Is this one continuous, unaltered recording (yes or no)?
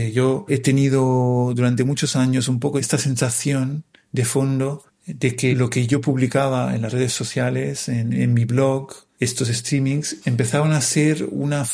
yes